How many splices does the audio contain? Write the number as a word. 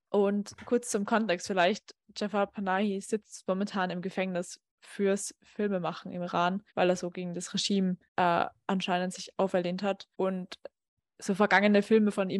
three